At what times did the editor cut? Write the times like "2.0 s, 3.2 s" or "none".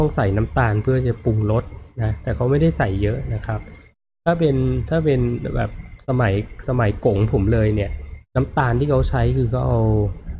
8.3 s

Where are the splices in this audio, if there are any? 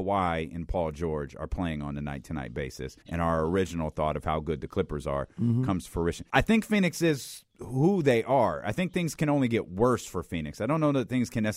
3.0 s, 6.3 s, 7.5 s

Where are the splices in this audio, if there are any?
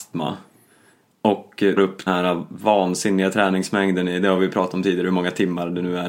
1.8 s, 2.1 s

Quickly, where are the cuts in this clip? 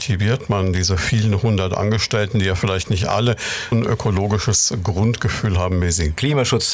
3.7 s

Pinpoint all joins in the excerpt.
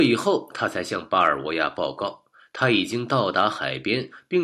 none

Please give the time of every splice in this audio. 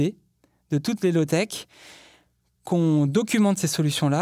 none

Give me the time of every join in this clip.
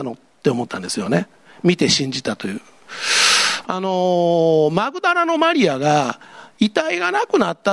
none

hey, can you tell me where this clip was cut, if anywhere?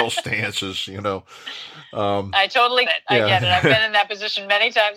2.9 s

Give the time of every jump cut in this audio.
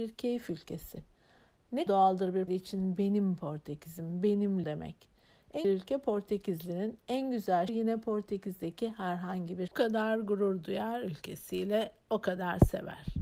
1.9 s, 2.5 s, 4.6 s, 5.6 s, 7.7 s, 9.7 s

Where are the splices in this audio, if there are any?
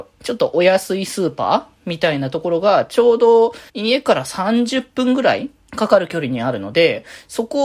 3.7 s, 5.7 s

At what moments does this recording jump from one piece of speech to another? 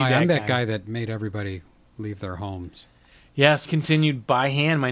3.6 s

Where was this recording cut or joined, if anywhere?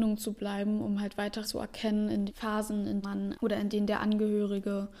1.4 s, 2.3 s, 3.0 s, 3.3 s

